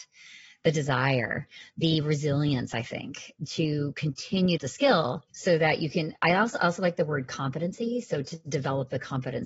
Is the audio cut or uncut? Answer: cut